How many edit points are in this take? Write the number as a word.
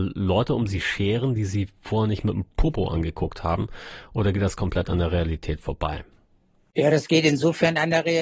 zero